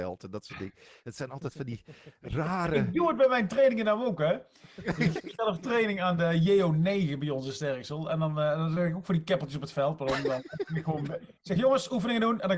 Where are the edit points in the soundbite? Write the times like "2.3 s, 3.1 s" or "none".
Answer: 11.4 s